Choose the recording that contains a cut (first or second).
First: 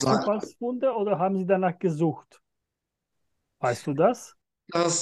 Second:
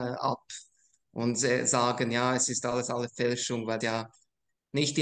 second